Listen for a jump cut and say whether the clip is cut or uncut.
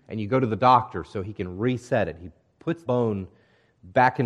cut